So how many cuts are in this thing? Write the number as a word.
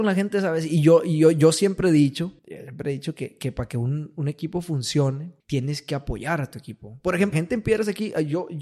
three